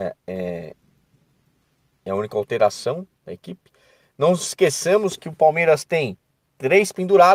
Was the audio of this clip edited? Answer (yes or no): no